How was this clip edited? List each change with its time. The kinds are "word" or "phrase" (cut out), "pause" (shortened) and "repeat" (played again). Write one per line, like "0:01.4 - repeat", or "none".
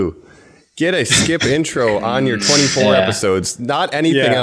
none